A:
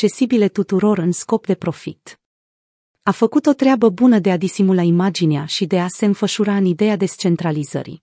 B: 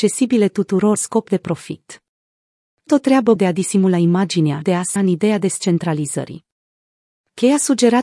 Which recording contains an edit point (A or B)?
B